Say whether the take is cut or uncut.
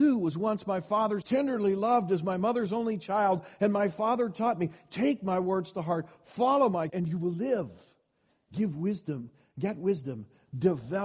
cut